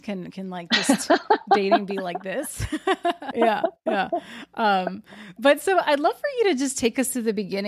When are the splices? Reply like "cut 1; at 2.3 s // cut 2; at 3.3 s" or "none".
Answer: cut 1; at 3.3 s